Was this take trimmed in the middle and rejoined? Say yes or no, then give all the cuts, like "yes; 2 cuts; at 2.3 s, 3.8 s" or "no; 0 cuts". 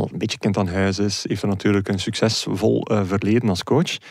no; 0 cuts